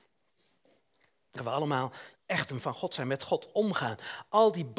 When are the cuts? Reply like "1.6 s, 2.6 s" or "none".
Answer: 1.4 s, 2.1 s, 2.6 s